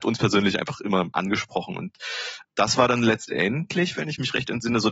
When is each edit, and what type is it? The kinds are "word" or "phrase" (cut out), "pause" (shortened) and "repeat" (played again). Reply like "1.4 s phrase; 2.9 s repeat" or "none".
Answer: 1.1 s word; 2.5 s word